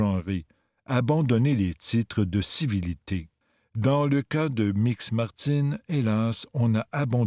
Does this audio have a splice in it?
yes; 1 cut; at 3.4 s

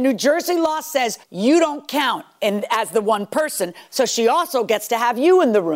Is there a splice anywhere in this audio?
yes; 1 cut; at 1.2 s

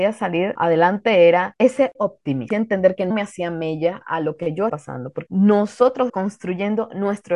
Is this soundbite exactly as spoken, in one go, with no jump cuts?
no; 6 cuts; at 2.0 s, 2.5 s, 3.1 s, 4.7 s, 5.3 s, 6.1 s

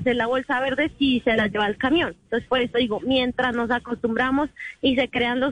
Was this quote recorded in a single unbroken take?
yes; 0 cuts

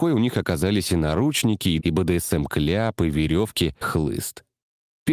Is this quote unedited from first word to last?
no; 2 cuts; at 1.8 s, 3.8 s

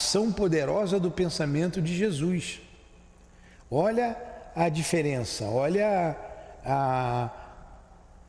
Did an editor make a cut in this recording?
no; 0 cuts

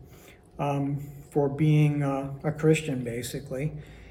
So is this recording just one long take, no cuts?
no; 1 cut; at 1.3 s

